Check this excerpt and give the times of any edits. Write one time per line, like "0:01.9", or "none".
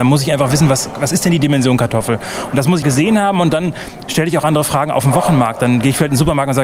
0:02.8